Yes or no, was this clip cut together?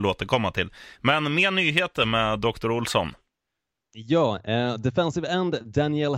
no